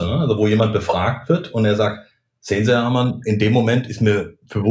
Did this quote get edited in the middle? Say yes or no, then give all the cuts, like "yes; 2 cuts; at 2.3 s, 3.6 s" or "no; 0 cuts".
no; 0 cuts